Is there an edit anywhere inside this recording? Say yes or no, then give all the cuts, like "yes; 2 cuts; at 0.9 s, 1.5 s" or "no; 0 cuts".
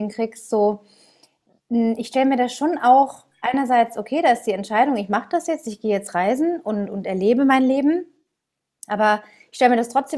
no; 0 cuts